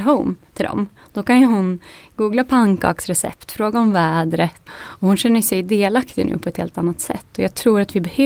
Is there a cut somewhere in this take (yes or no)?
yes